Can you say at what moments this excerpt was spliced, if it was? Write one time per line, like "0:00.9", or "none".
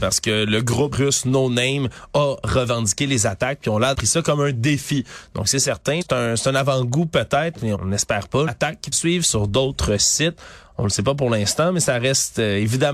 0:00.9
0:03.9
0:06.0
0:07.7
0:08.5
0:08.9